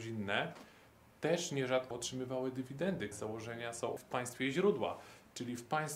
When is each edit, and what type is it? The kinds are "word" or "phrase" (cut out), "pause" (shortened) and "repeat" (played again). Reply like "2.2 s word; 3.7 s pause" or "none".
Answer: 1.9 s word; 3.1 s word; 4.0 s word